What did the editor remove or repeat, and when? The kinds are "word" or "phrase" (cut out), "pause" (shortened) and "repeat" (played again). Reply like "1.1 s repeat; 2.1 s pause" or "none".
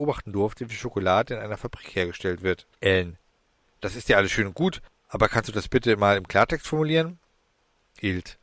2.7 s pause